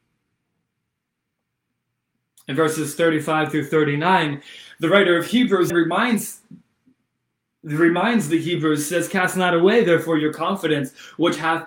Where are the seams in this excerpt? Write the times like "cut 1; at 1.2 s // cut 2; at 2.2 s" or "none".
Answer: cut 1; at 5.7 s